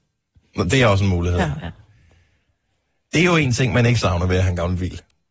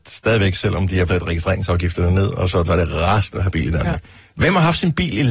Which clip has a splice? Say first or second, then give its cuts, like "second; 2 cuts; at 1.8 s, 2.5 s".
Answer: second; 3 cuts; at 1.1 s, 2.7 s, 3.4 s